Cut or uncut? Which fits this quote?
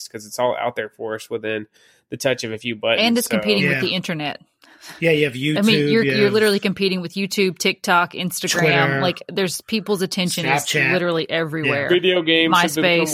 uncut